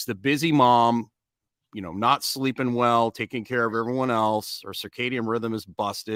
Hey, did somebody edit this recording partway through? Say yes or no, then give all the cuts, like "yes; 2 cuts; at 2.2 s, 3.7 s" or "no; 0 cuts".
no; 0 cuts